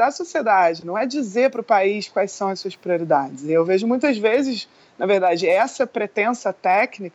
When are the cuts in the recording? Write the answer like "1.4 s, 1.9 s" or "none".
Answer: none